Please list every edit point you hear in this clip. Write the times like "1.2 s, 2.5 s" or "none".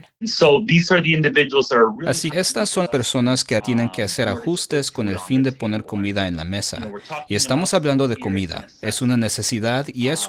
2.3 s, 2.9 s, 3.6 s